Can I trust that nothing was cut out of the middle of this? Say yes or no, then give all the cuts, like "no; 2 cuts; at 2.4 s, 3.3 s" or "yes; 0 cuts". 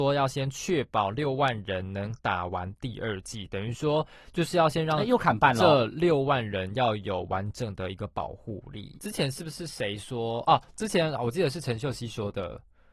no; 1 cut; at 9.0 s